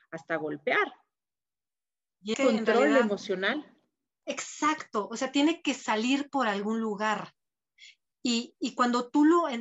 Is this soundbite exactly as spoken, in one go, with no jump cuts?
no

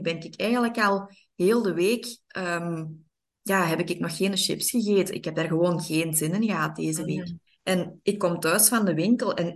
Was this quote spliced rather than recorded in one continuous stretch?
yes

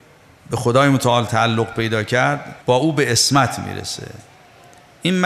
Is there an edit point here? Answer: yes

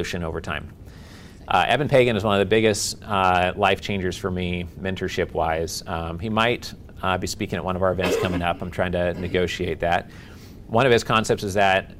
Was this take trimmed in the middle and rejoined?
no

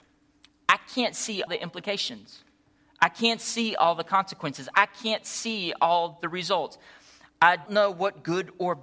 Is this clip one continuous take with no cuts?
no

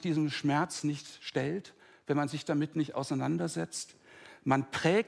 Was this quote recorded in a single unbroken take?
yes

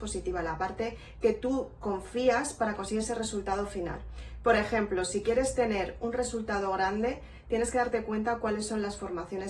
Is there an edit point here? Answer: no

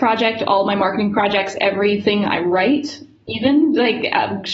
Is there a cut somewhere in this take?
no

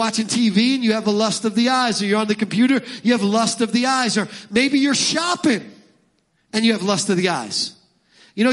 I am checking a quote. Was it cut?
no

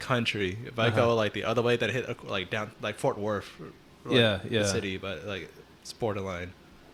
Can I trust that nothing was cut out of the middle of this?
yes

